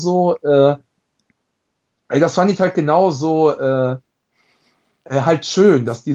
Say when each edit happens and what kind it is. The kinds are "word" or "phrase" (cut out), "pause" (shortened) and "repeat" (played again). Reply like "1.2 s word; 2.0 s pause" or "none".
none